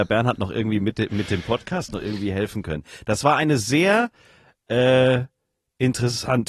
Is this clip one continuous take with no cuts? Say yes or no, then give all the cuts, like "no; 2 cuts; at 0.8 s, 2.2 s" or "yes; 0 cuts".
yes; 0 cuts